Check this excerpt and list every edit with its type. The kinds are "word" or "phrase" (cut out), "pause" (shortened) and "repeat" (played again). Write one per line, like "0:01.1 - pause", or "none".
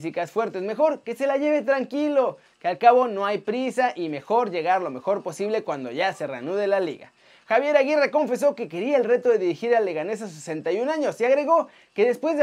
none

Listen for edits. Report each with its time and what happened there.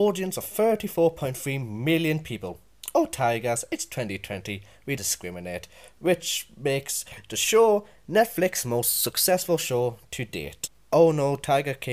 0:05.0 - word

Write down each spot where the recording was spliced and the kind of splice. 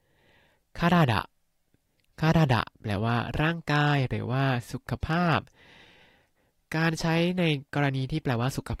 none

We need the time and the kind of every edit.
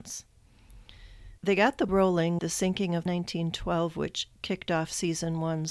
0:01.4 - pause
0:01.9 - word
0:02.4 - word
0:03.1 - phrase

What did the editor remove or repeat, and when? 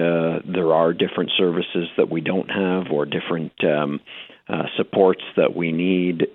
none

